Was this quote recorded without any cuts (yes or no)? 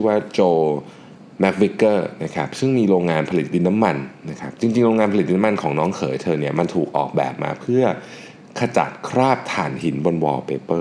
yes